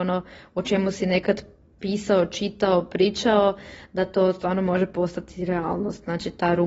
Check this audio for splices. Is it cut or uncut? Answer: uncut